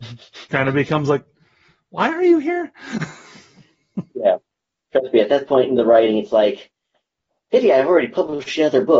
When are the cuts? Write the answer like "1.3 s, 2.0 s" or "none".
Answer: none